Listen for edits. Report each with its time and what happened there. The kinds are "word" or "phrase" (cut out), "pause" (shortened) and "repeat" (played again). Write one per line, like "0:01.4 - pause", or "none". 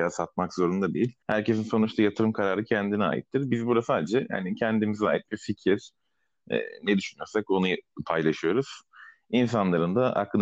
0:01.2 - pause